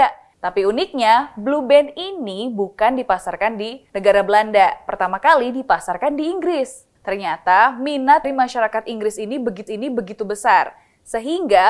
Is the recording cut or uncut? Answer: cut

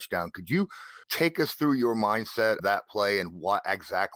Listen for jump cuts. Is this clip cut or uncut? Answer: cut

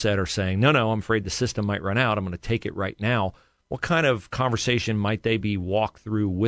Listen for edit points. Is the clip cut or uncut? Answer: uncut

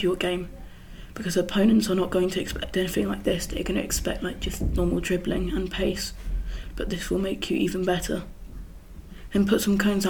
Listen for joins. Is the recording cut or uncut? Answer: uncut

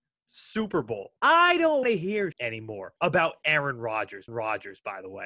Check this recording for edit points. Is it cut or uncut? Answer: cut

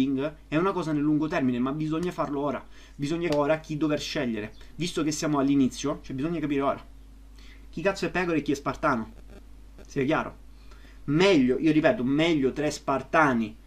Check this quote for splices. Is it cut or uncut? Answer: cut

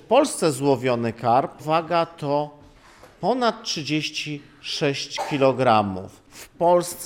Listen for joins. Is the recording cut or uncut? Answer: cut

